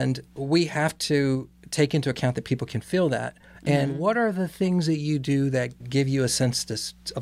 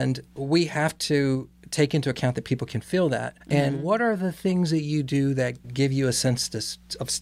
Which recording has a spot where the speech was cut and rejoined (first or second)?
second